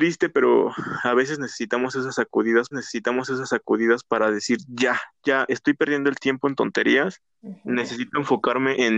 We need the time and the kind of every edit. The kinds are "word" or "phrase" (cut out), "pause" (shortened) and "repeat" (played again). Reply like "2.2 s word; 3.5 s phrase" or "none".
2.7 s repeat; 7.3 s pause

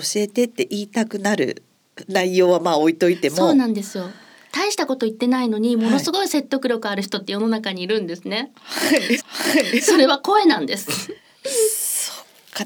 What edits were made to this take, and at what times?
9.2 s repeat; 11.2 s pause

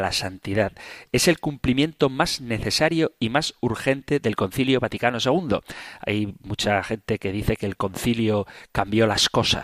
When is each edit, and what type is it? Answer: none

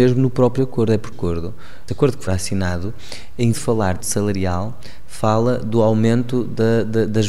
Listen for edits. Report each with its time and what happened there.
1.1 s word; 1.9 s phrase; 2.3 s word; 3.5 s word; 4.0 s word

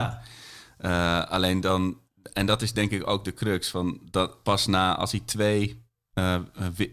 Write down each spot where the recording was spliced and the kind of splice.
none

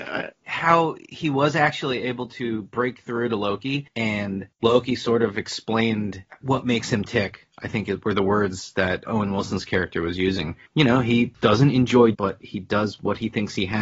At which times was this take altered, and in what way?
9.0 s word; 10.6 s pause; 12.1 s phrase

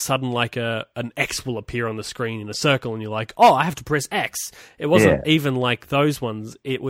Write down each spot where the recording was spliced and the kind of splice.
none

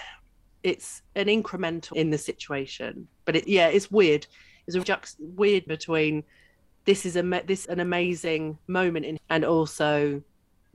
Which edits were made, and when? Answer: 1.1 s word; 1.9 s word; 3.4 s word; 4.8 s word; 5.7 s word; 7.6 s word; 9.2 s word

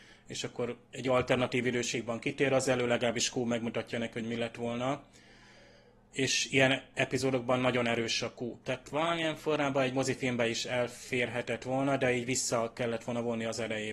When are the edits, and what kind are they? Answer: none

